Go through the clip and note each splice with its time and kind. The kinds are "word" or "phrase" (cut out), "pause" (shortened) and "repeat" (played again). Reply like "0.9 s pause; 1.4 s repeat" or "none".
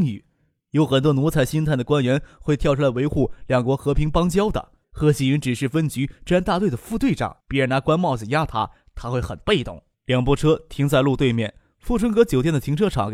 4.8 s pause; 7.4 s pause; 9.9 s pause

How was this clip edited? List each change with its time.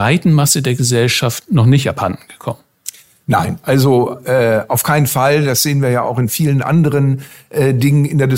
none

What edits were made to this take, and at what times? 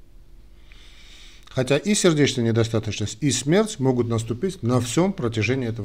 none

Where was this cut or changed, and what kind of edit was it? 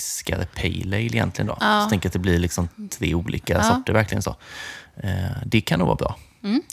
none

